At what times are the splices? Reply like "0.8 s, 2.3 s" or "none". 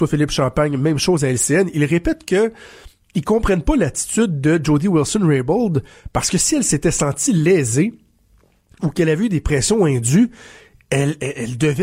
none